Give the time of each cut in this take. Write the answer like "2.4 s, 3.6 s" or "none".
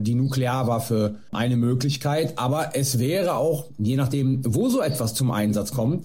none